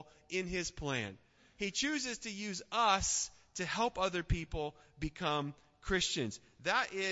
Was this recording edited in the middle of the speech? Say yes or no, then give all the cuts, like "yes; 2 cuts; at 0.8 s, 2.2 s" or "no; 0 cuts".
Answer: no; 0 cuts